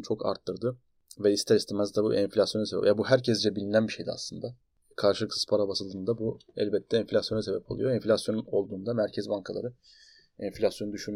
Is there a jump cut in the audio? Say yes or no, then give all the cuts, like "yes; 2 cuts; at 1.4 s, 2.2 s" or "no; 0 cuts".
no; 0 cuts